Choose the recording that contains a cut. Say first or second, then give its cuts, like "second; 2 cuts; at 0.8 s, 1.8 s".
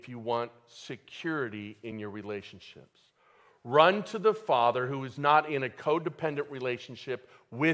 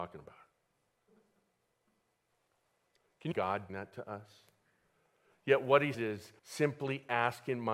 second; 4 cuts; at 3.3 s, 3.7 s, 5.9 s, 6.4 s